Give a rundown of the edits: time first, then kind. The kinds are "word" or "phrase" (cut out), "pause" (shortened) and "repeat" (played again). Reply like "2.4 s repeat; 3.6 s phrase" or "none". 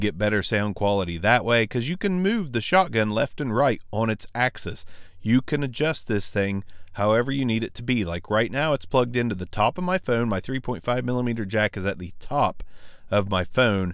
none